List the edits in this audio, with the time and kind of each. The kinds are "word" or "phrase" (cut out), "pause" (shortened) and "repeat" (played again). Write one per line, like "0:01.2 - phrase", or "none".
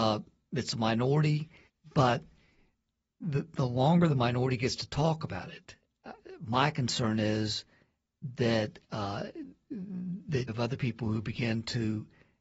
0:01.7 - pause
0:10.5 - word